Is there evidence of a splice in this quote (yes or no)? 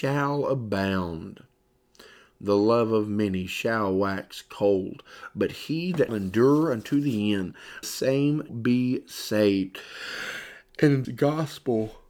yes